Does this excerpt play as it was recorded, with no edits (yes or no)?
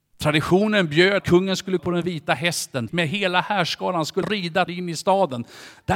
no